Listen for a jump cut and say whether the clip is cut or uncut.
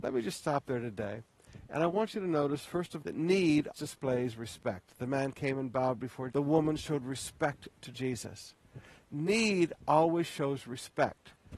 cut